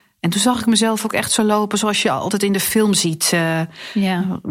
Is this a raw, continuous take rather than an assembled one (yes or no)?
yes